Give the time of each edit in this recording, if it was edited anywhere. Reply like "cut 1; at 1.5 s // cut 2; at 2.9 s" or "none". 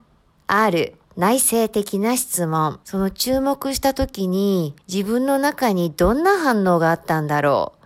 cut 1; at 1.0 s // cut 2; at 2.8 s // cut 3; at 4.8 s